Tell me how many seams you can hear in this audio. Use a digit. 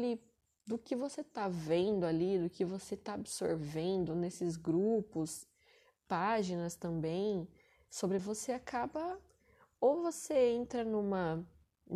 1